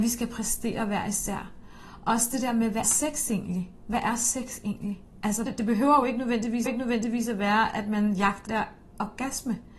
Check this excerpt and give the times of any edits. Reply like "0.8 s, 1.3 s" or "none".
2.8 s, 5.5 s, 6.7 s, 8.5 s